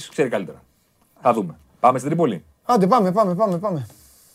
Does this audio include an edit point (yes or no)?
no